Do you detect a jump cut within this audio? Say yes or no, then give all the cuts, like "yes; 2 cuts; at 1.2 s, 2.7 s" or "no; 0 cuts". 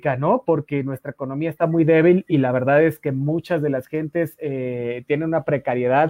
no; 0 cuts